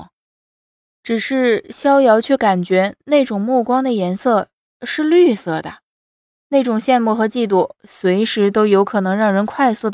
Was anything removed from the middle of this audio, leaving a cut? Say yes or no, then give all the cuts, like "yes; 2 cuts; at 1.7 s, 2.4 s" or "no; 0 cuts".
no; 0 cuts